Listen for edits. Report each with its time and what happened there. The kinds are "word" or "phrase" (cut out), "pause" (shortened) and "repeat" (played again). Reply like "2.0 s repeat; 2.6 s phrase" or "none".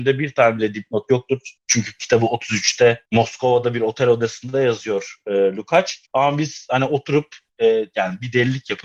1.6 s pause; 3.1 s pause; 6.1 s pause

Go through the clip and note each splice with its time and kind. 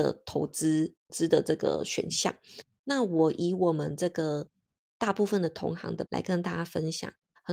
6.1 s word

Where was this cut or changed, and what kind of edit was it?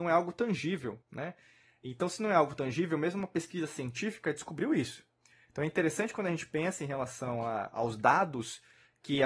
1.0 s pause

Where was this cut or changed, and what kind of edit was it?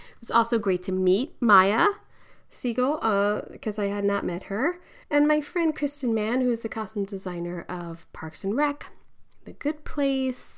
5.0 s pause

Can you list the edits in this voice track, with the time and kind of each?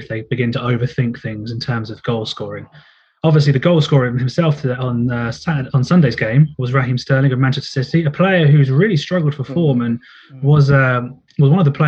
none

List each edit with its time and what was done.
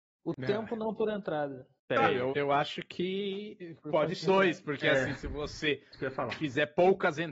1.8 s pause; 2.3 s word; 4.2 s word

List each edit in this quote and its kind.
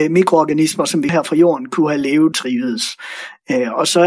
1.1 s word; 2.3 s word

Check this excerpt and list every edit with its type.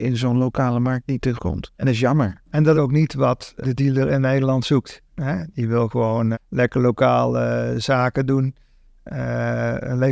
1.4 s word; 1.8 s pause; 2.4 s pause; 2.7 s phrase; 3.6 s word; 6.3 s word

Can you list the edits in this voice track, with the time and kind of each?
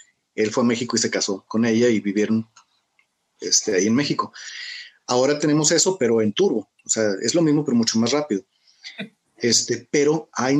none

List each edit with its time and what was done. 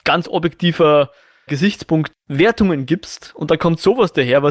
1.5 s word; 2.1 s word

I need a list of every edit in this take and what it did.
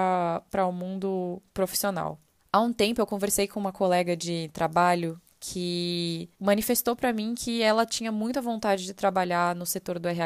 2.4 s pause; 6.3 s pause

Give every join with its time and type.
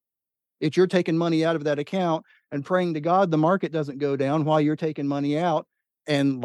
none

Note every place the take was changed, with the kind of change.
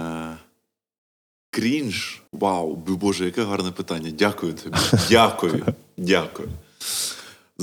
2.3 s pause

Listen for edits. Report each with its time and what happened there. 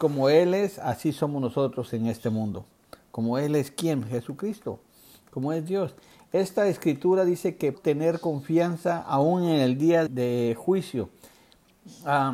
7.7 s word; 10.1 s word

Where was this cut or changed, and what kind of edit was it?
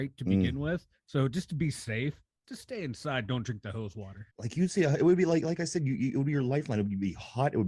2.4 s word; 4.3 s pause

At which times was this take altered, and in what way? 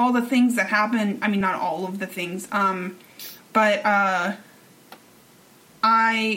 none

